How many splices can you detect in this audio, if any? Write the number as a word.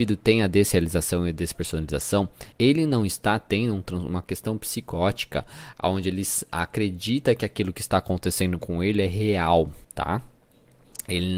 two